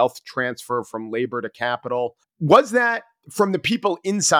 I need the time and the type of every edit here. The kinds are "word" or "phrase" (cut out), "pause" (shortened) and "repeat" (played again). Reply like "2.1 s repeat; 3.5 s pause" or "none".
2.2 s pause